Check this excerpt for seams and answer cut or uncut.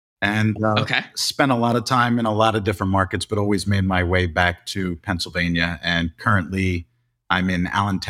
uncut